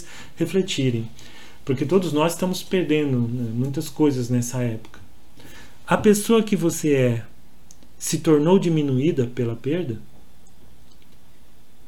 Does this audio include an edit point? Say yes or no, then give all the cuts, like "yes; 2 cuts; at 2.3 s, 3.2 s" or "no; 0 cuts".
no; 0 cuts